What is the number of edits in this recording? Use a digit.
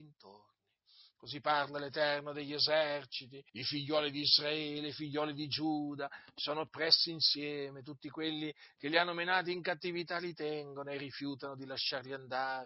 1